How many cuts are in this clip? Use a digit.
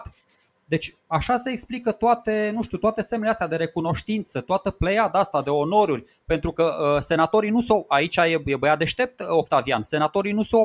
0